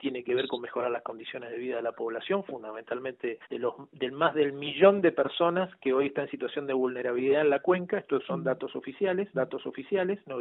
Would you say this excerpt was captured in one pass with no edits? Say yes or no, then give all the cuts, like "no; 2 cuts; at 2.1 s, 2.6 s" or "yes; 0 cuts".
no; 2 cuts; at 3.4 s, 9.3 s